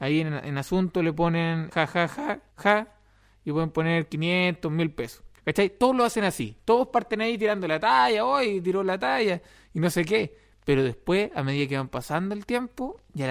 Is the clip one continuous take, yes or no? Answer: no